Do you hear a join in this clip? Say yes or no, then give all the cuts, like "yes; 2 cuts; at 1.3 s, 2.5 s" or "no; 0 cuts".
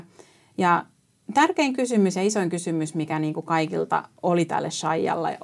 no; 0 cuts